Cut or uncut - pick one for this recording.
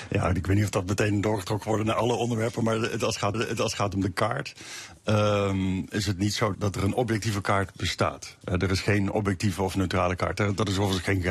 cut